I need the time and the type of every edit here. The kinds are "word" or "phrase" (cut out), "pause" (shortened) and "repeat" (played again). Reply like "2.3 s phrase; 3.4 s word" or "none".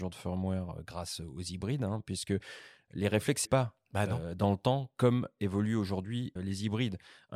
3.4 s word; 6.4 s word